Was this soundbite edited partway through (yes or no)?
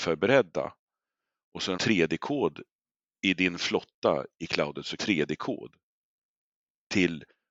yes